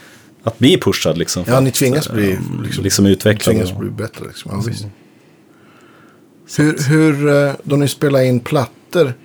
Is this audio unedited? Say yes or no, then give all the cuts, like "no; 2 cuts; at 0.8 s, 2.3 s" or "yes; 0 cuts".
yes; 0 cuts